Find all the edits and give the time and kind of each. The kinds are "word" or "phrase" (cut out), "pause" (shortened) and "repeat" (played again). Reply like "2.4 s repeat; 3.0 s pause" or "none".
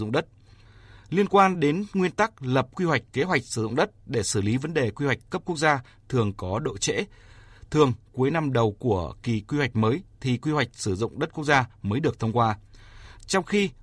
none